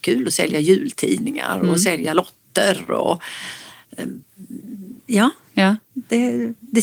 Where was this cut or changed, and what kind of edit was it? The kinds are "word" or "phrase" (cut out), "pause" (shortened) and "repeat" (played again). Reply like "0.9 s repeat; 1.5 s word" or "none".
none